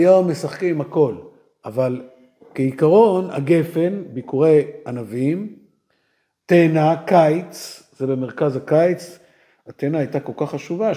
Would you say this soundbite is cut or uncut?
uncut